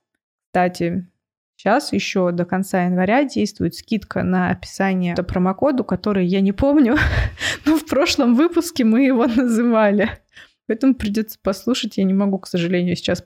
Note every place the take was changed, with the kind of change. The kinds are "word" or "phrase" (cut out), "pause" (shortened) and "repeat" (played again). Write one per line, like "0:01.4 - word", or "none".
0:05.1 - phrase